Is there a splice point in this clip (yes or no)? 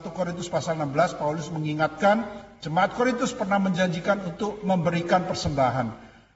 no